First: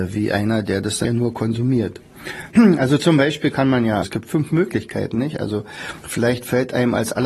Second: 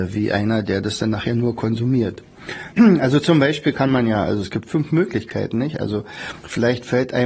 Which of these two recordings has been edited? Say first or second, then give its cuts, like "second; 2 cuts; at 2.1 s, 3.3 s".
first; 2 cuts; at 1.0 s, 4.0 s